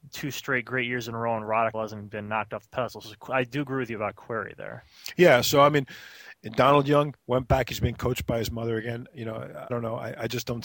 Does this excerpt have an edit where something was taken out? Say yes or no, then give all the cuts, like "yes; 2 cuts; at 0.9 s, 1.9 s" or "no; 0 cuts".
yes; 3 cuts; at 1.7 s, 7.2 s, 9.7 s